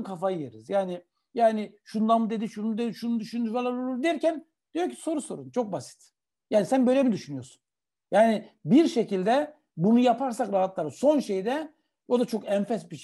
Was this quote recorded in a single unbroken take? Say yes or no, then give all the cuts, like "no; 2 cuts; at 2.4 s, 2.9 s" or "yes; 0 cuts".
yes; 0 cuts